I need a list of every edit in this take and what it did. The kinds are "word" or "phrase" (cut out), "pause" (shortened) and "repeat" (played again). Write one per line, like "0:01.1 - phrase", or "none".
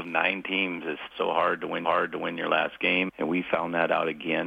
0:01.1 - word
0:01.8 - repeat
0:03.1 - word